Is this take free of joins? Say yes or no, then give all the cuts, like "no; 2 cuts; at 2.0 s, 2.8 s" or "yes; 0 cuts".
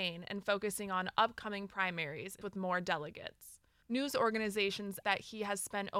no; 3 cuts; at 2.4 s, 3.8 s, 5.0 s